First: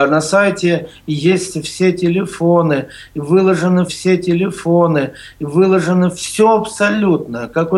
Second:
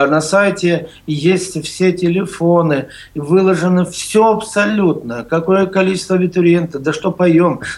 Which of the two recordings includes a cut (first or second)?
first